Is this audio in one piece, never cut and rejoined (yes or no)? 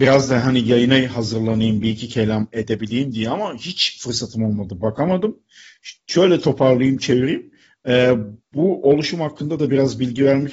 yes